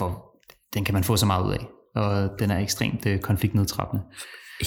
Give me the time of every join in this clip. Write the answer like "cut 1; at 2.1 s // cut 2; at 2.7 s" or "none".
none